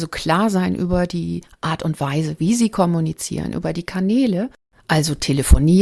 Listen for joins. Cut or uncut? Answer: uncut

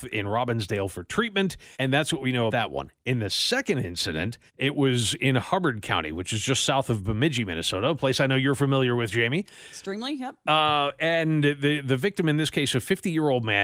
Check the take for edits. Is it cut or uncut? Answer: cut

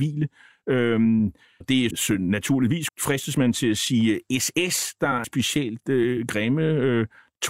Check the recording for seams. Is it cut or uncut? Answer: cut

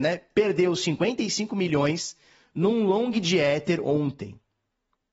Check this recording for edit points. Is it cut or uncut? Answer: uncut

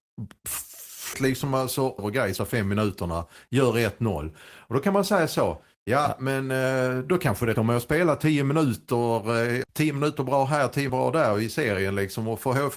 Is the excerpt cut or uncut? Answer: cut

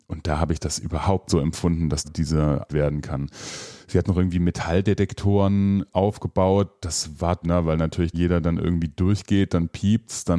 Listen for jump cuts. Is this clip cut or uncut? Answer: cut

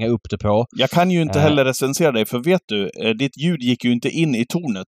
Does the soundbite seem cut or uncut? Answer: uncut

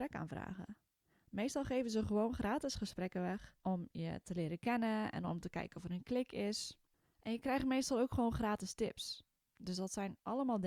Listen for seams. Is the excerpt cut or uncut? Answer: uncut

